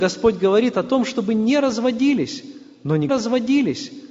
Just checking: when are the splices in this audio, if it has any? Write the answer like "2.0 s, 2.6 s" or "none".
3.1 s